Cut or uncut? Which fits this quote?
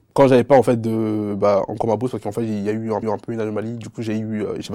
cut